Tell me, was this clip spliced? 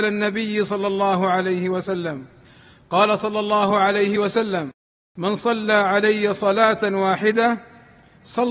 no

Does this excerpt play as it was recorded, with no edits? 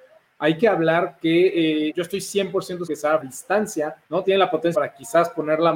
no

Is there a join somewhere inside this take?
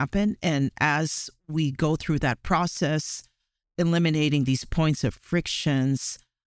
no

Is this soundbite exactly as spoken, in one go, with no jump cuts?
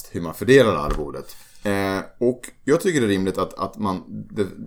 yes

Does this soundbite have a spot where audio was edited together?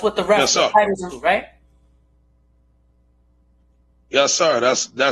yes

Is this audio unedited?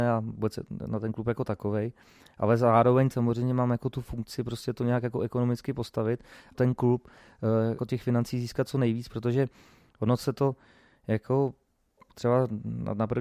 no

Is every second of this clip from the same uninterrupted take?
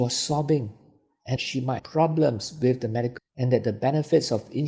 no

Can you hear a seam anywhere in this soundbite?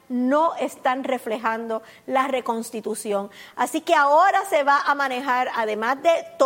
no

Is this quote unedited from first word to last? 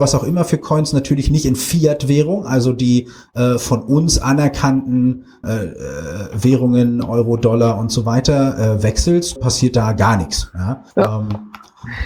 no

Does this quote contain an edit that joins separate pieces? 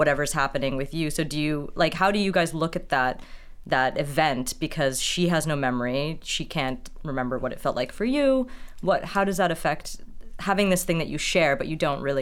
no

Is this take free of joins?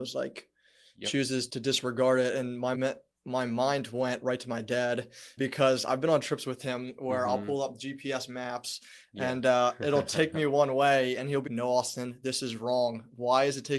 no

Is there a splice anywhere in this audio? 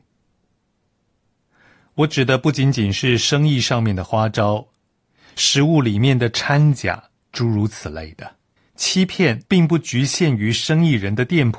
yes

